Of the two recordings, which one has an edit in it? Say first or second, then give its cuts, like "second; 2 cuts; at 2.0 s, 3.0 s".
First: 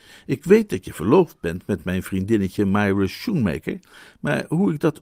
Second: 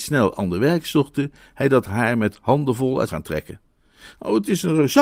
second; 1 cut; at 3.1 s